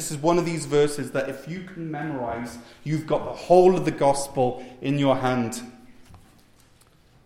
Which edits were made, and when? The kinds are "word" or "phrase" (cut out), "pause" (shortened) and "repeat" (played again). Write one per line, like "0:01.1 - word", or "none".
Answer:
none